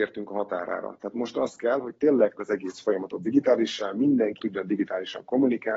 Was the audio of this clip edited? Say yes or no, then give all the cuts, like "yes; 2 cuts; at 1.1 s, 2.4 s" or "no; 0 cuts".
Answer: yes; 2 cuts; at 2.4 s, 4.4 s